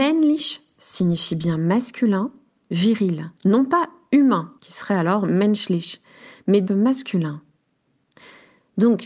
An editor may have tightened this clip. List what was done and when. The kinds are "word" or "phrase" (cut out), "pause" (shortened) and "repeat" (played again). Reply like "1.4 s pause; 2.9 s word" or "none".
3.4 s pause; 4.6 s pause; 6.7 s word